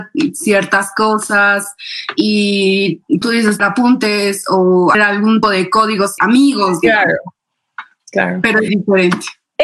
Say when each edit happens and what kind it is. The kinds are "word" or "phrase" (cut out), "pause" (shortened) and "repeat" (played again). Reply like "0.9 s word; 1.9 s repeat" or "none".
3.2 s word; 3.6 s word; 4.9 s word; 5.4 s word; 6.2 s word; 8.7 s word